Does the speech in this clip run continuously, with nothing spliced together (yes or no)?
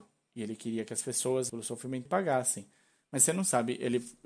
no